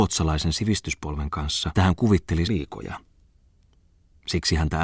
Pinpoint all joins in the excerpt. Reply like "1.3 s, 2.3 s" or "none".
1.7 s, 2.5 s